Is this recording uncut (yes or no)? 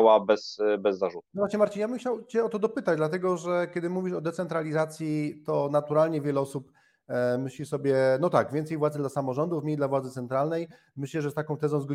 yes